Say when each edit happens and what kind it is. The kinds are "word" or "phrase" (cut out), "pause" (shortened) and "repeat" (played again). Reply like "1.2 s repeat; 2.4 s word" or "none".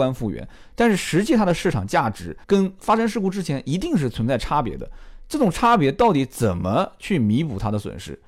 2.4 s pause